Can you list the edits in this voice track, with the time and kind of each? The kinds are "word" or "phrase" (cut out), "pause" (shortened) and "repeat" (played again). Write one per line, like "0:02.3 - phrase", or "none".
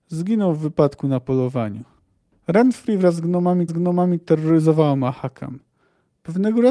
0:02.0 - pause
0:03.7 - repeat